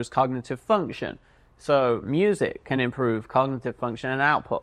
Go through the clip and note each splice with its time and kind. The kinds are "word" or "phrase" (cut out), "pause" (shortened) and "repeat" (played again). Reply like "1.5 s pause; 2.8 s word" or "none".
none